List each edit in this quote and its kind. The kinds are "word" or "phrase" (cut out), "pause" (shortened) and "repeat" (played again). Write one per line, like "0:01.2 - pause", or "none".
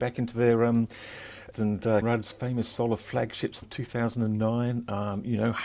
0:01.5 - phrase
0:02.0 - word
0:03.6 - word